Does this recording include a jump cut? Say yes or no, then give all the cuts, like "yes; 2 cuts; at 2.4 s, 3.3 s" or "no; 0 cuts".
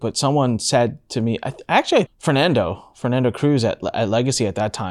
yes; 1 cut; at 2.1 s